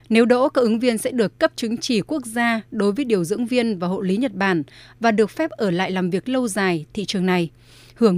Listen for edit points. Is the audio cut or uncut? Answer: cut